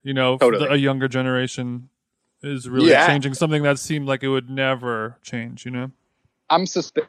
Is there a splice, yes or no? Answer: no